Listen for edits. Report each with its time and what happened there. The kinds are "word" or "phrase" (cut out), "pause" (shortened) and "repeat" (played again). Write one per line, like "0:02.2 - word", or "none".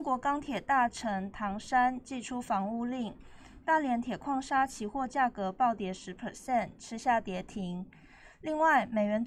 none